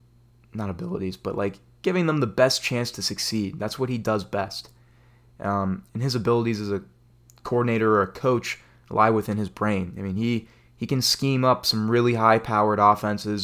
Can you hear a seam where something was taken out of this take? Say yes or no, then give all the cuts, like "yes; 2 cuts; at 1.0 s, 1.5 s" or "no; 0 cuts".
no; 0 cuts